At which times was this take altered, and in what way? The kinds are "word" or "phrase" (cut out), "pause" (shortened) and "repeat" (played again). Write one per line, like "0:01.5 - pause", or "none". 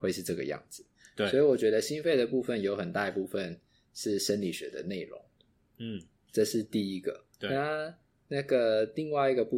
0:07.3 - pause

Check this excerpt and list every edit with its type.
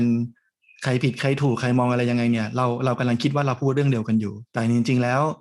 0:04.5 - pause

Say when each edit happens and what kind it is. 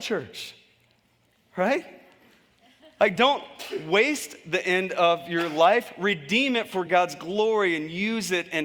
none

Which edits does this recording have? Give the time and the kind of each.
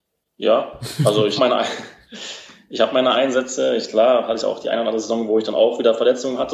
0:01.4 - word

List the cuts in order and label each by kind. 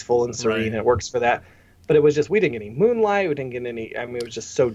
none

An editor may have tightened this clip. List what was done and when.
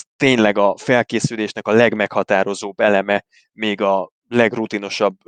none

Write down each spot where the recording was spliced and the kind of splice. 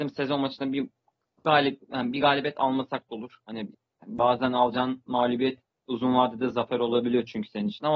none

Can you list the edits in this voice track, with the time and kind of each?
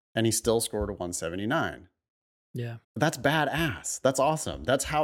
0:02.8 - pause

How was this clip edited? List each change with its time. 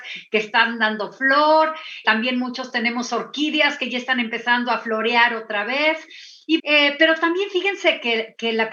0:02.0 - word
0:06.6 - word

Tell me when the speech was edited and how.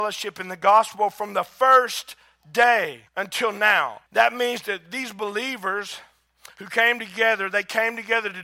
0:03.1 - pause
0:04.1 - pause

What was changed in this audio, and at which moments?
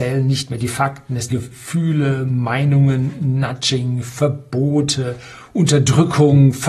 0:01.3 - word

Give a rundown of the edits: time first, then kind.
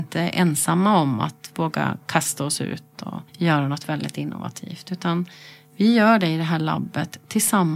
0:03.3 - pause

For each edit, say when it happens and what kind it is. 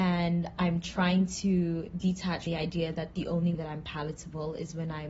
0:02.5 - word
0:03.5 - word

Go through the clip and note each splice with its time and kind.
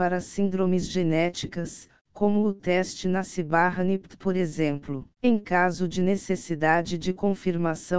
0:05.1 - pause

